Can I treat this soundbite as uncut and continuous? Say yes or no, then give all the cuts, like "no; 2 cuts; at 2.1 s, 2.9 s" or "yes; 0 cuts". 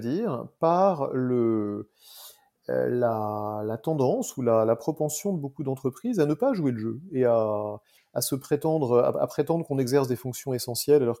yes; 0 cuts